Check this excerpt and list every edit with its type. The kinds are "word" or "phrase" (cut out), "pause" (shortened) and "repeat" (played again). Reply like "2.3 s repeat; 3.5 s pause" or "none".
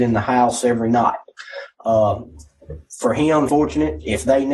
3.5 s word